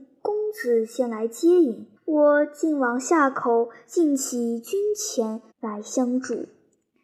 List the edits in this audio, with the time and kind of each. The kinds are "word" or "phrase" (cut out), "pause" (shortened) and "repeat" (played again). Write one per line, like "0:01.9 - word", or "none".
0:02.0 - pause
0:05.5 - pause